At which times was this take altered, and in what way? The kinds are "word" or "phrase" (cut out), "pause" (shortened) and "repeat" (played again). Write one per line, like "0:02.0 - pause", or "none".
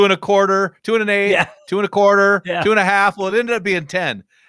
none